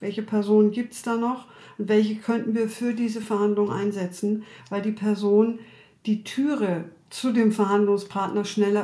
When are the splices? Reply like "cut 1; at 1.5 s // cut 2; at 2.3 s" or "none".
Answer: none